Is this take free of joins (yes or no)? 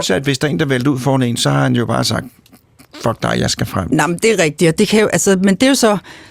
yes